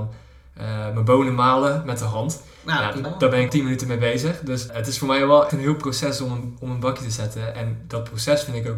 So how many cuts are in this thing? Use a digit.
4